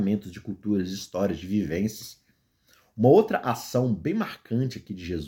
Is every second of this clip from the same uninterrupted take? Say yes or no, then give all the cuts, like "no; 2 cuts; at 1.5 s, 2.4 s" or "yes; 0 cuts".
yes; 0 cuts